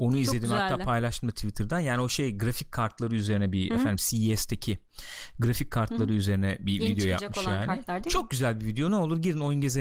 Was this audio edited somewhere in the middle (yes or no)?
no